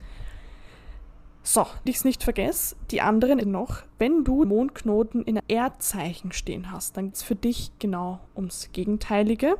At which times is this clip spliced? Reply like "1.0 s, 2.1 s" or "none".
1.9 s, 3.4 s, 4.4 s, 5.4 s, 7.1 s